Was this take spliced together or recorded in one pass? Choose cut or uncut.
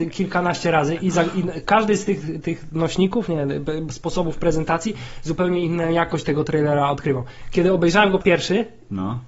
cut